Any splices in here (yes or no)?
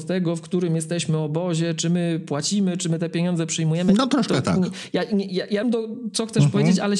yes